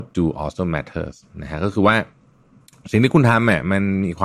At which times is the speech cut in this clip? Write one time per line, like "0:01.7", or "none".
none

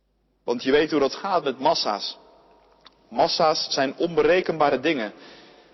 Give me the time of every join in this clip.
none

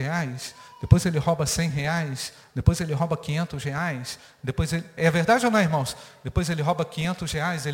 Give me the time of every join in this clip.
none

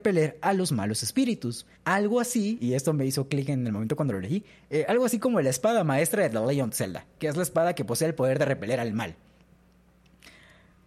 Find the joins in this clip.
0:01.8

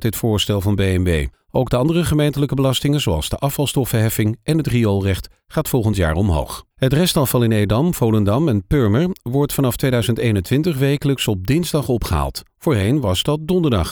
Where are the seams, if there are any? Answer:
0:01.3
0:06.7

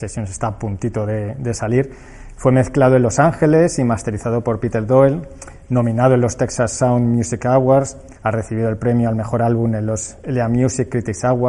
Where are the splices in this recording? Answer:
0:08.2

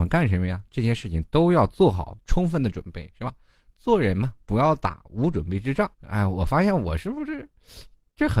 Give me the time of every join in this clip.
0:04.4
0:05.9

